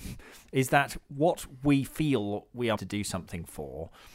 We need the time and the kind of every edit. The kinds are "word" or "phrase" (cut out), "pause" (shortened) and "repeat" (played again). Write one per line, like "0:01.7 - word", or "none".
0:02.8 - word